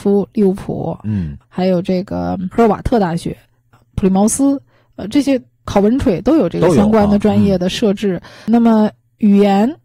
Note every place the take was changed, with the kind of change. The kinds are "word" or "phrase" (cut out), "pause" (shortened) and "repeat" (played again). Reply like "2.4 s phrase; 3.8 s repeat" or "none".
1.4 s pause